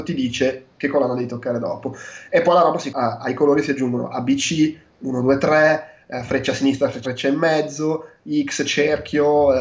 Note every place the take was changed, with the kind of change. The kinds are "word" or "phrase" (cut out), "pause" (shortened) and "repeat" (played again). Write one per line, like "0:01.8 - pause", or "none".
0:02.9 - phrase
0:07.0 - word

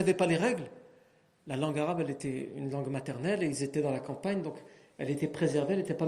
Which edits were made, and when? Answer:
none

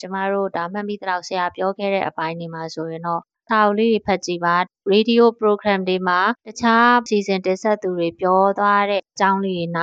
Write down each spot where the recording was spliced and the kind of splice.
0:06.4 - pause

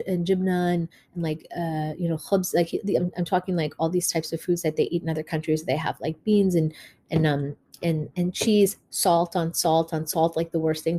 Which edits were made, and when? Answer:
none

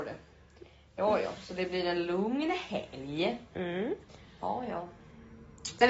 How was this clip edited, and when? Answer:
none

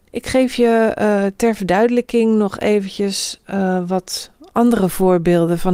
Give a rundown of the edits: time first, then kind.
none

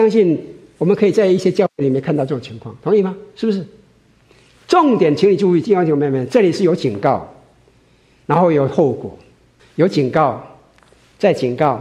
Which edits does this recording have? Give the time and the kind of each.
0:09.6 - pause

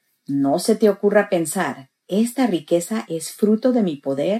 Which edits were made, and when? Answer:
none

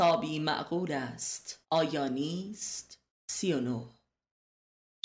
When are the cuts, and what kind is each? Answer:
0:01.6 - pause
0:03.1 - pause

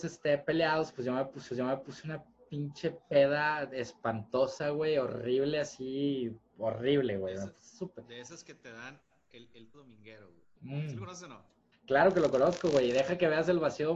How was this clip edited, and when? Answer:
0:01.5 - repeat
0:09.7 - phrase
0:10.5 - pause
0:11.7 - pause

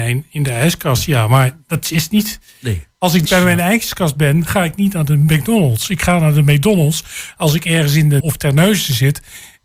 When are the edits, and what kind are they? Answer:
0:03.3 - word
0:08.2 - word

